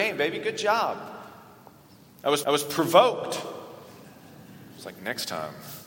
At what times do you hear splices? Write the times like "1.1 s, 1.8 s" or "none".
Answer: 2.4 s